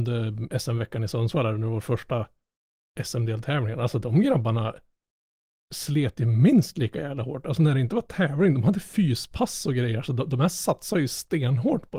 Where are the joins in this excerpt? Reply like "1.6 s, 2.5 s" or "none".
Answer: none